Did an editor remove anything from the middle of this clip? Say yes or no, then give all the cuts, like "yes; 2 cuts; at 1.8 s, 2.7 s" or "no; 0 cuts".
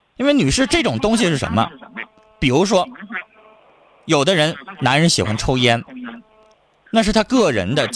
no; 0 cuts